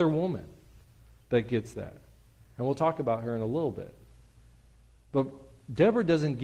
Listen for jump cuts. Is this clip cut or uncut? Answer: uncut